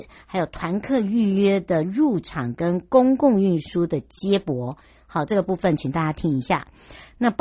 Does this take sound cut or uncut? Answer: uncut